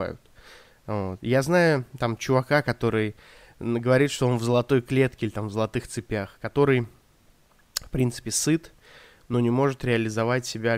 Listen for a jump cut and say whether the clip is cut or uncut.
uncut